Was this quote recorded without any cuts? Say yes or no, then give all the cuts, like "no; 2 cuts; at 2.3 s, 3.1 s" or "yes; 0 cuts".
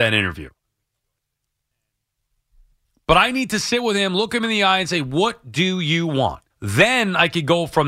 no; 1 cut; at 6.5 s